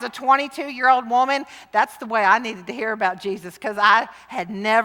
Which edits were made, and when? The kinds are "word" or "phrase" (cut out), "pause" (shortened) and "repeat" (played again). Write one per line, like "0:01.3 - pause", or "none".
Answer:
none